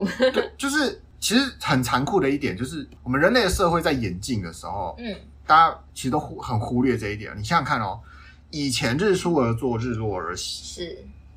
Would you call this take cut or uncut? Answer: cut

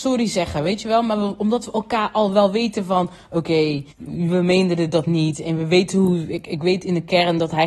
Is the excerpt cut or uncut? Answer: cut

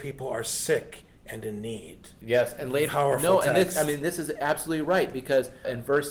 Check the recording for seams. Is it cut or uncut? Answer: cut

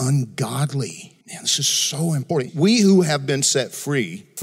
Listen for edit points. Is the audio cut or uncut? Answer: cut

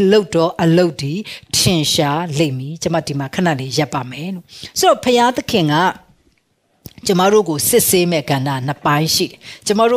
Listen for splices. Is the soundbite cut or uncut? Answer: uncut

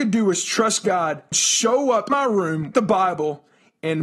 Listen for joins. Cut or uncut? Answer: cut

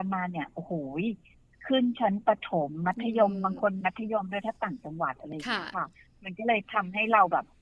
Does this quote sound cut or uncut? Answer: uncut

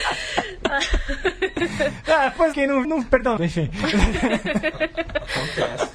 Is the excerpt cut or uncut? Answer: cut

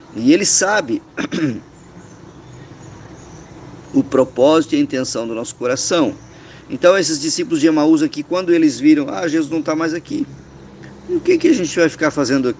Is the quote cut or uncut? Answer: uncut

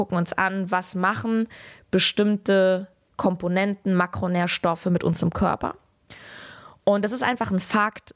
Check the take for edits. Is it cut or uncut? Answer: uncut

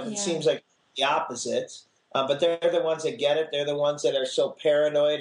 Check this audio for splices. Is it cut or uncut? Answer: uncut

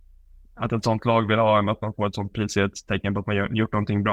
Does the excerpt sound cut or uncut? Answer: uncut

